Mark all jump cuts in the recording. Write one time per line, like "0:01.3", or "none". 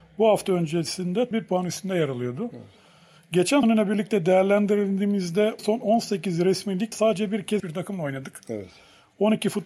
0:01.3
0:03.6
0:05.6
0:06.9
0:07.6